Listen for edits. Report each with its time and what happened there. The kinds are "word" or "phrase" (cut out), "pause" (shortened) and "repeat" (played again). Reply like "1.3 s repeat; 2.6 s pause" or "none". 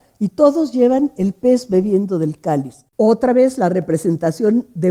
2.9 s pause